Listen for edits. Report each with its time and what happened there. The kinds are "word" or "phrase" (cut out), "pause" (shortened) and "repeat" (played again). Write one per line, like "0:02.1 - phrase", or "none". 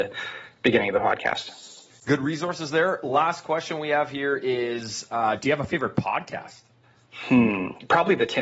none